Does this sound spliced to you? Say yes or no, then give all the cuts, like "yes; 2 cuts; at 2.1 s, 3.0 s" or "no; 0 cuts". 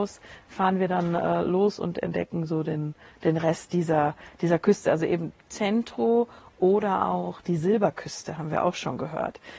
no; 0 cuts